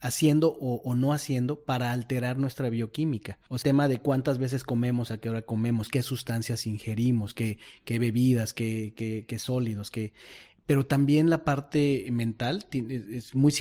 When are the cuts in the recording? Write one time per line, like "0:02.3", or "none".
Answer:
0:03.6